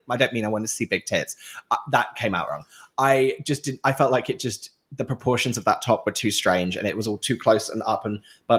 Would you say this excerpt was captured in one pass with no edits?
yes; 0 cuts

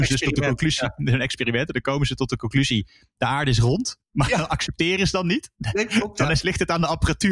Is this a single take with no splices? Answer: yes; 0 cuts

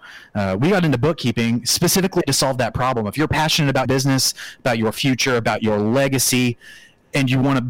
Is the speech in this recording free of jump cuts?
no; 1 cut; at 3.9 s

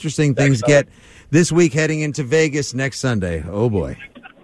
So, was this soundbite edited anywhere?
no; 0 cuts

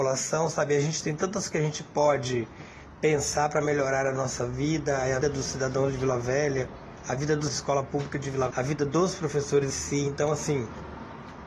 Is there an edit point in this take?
yes; 5 cuts; at 1.5 s, 5.2 s, 7.5 s, 8.5 s, 9.7 s

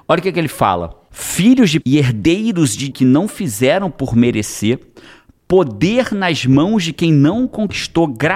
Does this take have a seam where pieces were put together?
yes; 2 cuts; at 1.8 s, 2.9 s

